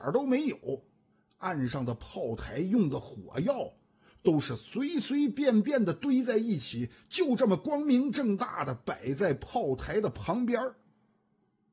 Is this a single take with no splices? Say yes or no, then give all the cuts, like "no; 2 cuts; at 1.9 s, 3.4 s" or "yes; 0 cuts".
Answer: yes; 0 cuts